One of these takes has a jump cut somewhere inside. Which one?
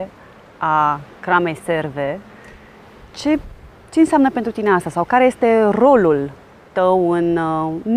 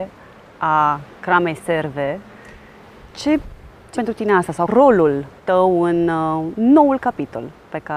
second; 3 cuts; at 3.9 s, 4.7 s, 5.4 s

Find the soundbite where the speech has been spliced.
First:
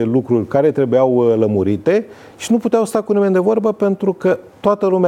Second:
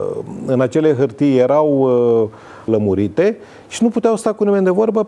second; 1 cut; at 2.7 s

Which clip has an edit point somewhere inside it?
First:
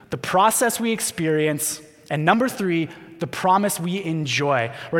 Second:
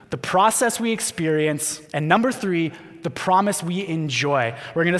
second; 1 cut; at 1.9 s

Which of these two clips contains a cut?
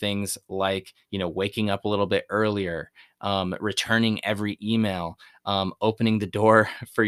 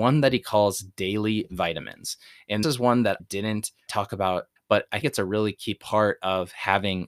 second; 5 cuts; at 2.6 s, 3.2 s, 3.9 s, 4.6 s, 5.0 s

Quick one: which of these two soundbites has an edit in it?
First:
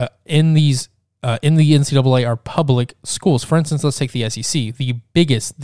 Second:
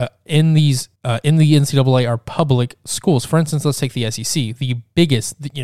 second; 1 cut; at 1.0 s

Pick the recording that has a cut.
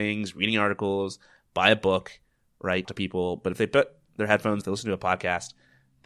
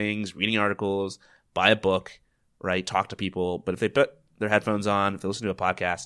first; 2 cuts; at 2.8 s, 4.6 s

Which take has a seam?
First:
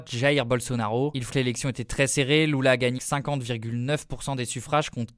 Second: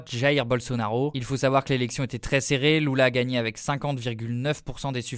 first; 2 cuts; at 1.3 s, 3.0 s

